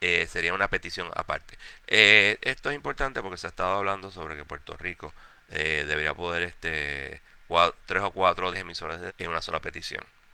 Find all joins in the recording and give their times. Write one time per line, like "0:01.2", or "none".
0:07.4
0:08.5
0:09.1